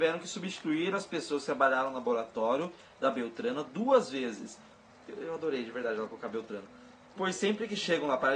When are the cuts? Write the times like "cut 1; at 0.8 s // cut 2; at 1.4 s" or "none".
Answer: none